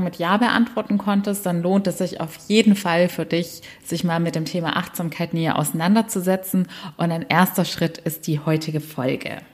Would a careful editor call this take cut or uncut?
uncut